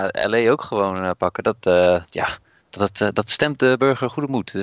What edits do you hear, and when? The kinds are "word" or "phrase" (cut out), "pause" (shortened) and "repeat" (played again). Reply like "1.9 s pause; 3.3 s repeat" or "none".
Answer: none